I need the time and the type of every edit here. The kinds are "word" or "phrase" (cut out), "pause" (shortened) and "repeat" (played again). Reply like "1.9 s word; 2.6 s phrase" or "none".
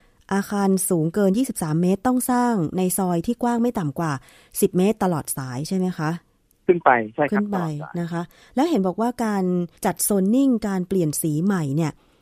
9.8 s pause